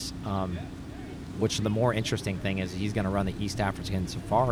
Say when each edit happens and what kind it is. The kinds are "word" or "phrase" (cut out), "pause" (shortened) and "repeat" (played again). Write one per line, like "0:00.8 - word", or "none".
none